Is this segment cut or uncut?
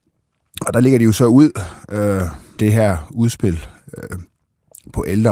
cut